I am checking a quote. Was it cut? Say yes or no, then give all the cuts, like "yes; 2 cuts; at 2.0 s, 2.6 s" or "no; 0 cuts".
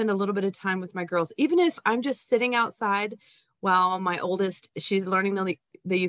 no; 0 cuts